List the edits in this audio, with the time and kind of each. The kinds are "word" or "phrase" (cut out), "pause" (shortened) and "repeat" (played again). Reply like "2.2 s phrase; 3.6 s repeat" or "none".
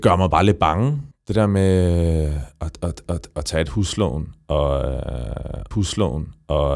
1.1 s pause; 3.1 s repeat; 5.7 s repeat